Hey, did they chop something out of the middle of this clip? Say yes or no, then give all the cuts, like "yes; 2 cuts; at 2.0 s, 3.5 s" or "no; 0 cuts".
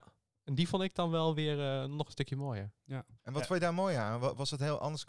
yes; 1 cut; at 3.2 s